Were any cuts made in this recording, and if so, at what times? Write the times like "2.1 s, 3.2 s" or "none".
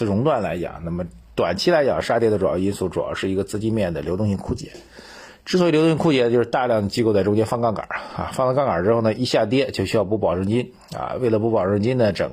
1.2 s